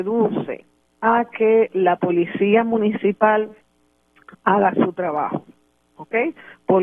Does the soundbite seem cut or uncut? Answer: uncut